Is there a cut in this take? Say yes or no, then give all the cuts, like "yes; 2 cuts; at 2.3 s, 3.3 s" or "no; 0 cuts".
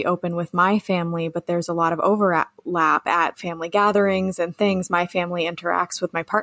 yes; 1 cut; at 3.3 s